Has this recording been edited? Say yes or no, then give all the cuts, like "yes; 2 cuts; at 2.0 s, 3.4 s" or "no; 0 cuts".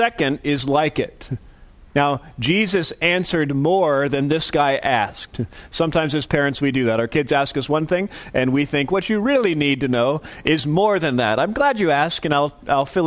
no; 0 cuts